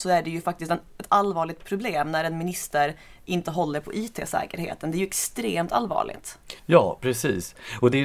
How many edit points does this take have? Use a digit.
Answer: 1